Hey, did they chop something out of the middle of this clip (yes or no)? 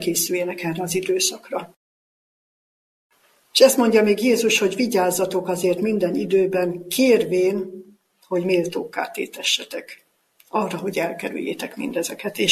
no